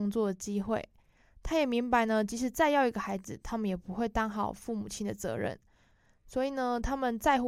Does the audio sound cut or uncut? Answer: uncut